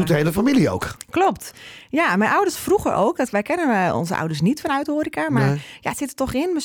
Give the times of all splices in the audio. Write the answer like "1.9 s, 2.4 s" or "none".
none

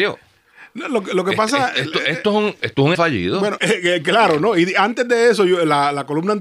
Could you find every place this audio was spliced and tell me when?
2.9 s, 3.6 s

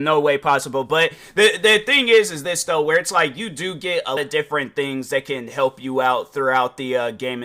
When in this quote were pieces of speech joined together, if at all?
4.2 s

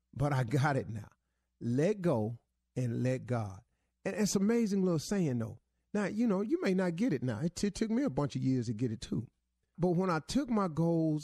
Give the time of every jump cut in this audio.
none

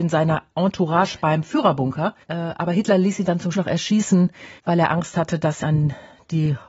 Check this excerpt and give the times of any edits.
2.2 s, 3.5 s, 4.6 s, 5.6 s

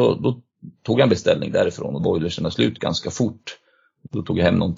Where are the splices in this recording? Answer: 2.0 s

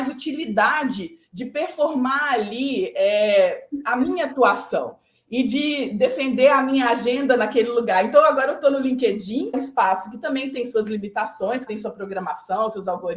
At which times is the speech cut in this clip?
9.5 s, 11.7 s

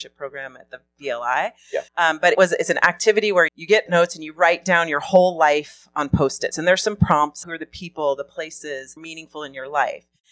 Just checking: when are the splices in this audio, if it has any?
1.9 s, 2.3 s, 3.5 s, 3.9 s, 6.5 s, 7.4 s, 9.0 s

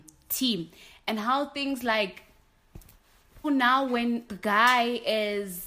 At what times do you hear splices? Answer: 3.4 s, 4.3 s

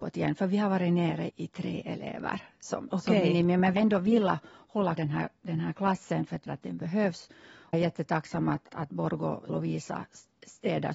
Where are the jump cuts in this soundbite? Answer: 1.3 s, 3.8 s, 5.0 s, 6.5 s, 7.7 s, 8.7 s, 9.5 s

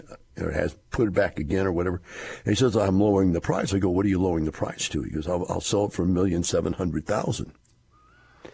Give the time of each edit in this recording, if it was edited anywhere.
none

